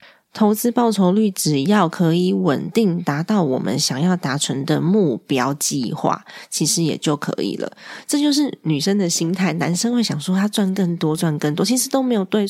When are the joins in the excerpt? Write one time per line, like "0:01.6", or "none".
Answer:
none